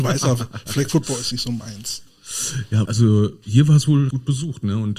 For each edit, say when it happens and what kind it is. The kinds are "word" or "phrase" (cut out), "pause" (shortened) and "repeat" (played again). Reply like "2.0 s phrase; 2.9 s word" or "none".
1.3 s word; 2.9 s word; 4.1 s word